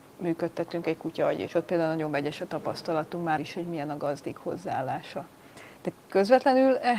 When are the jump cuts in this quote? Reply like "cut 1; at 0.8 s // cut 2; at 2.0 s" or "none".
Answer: cut 1; at 1.5 s // cut 2; at 3.4 s